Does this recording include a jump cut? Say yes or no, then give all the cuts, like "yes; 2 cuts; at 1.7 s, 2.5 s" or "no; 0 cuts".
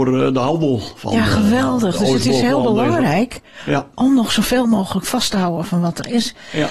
no; 0 cuts